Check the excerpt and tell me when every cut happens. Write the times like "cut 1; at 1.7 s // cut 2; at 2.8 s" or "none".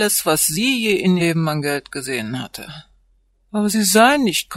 cut 1; at 1.2 s